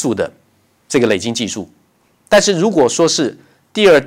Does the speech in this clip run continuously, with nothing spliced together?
yes; 0 cuts

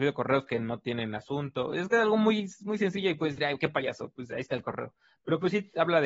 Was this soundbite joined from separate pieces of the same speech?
no; 0 cuts

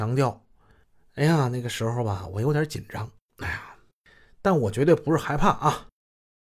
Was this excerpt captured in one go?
yes; 0 cuts

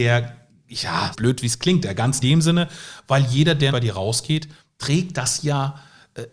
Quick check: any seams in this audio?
yes; 3 cuts; at 1.1 s, 2.2 s, 3.7 s

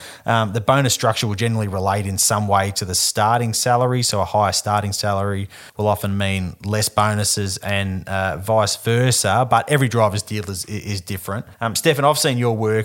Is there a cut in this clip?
yes; 2 cuts; at 5.7 s, 11.5 s

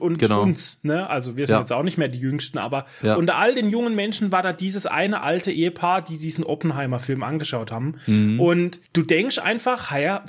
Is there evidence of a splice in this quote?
yes; 1 cut; at 8.9 s

